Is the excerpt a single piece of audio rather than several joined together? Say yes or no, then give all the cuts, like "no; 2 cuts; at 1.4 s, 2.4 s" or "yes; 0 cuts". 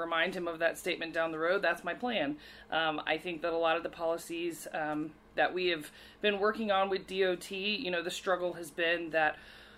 yes; 0 cuts